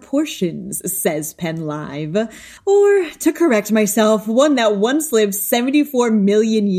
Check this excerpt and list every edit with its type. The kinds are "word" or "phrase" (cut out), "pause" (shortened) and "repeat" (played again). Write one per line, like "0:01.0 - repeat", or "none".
none